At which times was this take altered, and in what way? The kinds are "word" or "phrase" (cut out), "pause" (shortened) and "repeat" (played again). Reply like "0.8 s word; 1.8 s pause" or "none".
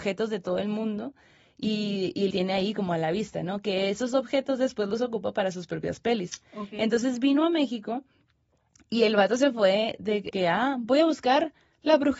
2.3 s word; 10.3 s word